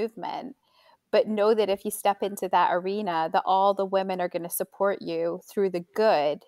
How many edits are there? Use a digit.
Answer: 0